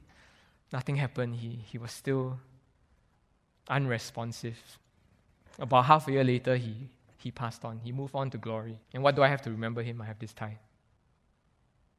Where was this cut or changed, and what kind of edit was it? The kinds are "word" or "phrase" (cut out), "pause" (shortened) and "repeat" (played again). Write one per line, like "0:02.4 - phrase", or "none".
0:08.8 - pause